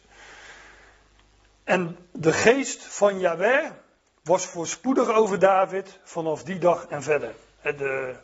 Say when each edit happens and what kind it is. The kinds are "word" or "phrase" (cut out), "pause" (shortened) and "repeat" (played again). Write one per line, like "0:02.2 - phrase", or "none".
none

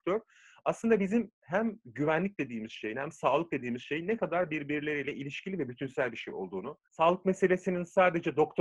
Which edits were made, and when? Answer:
0:06.8 - pause

